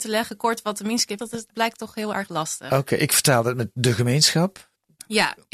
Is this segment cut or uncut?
cut